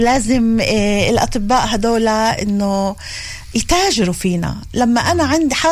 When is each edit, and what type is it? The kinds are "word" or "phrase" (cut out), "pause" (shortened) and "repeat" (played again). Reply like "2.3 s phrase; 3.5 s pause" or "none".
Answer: none